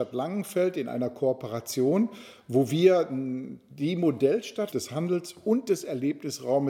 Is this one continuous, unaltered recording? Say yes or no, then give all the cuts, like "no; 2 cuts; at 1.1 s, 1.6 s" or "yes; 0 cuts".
no; 1 cut; at 4.7 s